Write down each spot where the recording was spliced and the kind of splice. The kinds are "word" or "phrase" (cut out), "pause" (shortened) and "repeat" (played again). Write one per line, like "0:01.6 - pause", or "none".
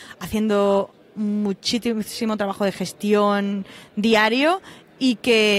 none